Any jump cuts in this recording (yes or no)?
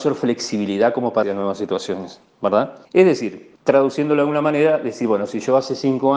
yes